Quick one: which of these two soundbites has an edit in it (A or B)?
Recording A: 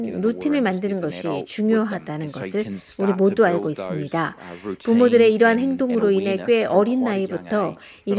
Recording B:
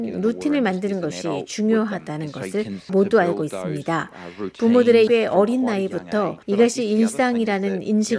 B